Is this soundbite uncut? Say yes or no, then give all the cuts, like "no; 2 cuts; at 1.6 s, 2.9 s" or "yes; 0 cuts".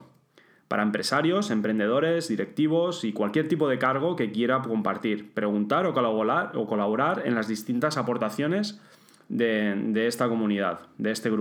yes; 0 cuts